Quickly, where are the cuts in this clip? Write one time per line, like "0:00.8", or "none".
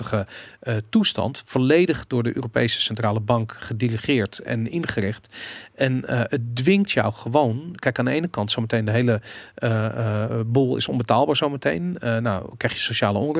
none